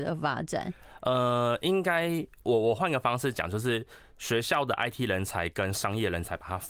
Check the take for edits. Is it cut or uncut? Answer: uncut